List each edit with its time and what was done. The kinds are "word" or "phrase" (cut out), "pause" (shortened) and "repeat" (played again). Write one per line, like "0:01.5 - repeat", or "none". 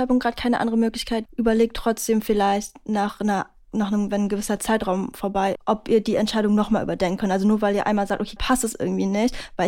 0:01.3 - word
0:05.5 - word
0:08.4 - word